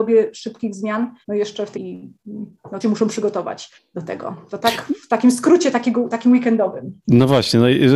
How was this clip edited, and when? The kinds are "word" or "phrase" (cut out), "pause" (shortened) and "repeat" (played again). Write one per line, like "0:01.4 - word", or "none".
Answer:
0:01.2 - pause
0:01.7 - word
0:02.8 - word
0:03.8 - pause